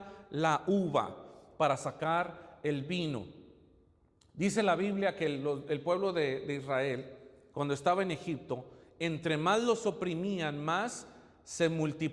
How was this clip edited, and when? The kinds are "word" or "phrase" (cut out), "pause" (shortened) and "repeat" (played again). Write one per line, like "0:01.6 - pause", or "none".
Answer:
none